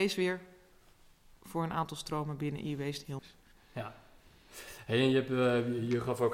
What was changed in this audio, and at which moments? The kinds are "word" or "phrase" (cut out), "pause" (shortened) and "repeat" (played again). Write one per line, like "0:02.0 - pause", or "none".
0:03.2 - word